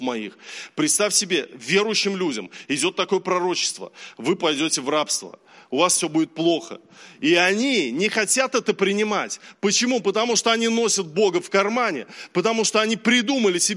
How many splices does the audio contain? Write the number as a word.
zero